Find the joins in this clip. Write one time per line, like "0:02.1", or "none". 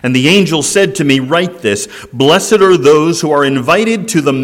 none